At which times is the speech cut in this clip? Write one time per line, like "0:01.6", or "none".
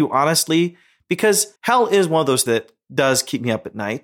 0:01.6
0:02.5